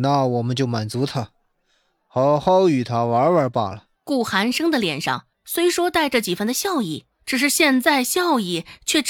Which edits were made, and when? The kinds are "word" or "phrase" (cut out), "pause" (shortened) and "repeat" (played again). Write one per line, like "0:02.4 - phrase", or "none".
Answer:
0:03.9 - pause
0:05.3 - pause
0:07.1 - pause